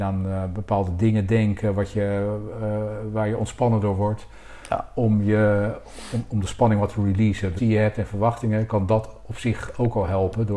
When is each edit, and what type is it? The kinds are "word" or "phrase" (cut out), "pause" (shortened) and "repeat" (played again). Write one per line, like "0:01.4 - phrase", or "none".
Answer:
0:07.6 - phrase